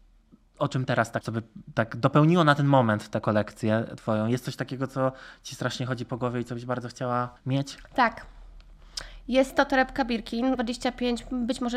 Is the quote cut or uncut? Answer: cut